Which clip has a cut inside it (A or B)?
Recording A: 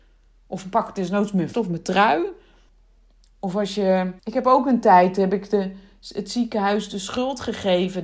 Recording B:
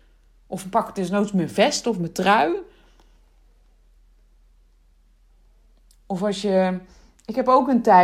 A